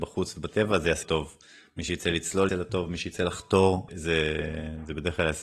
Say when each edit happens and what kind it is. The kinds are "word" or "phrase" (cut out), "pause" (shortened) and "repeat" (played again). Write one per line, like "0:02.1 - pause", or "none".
0:01.0 - word
0:02.5 - word
0:03.9 - word